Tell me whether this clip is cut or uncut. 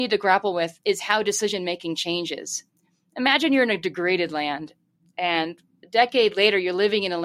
uncut